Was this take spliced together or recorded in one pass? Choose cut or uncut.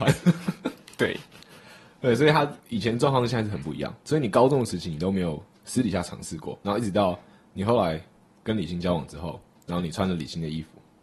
uncut